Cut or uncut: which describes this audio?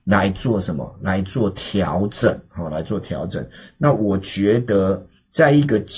uncut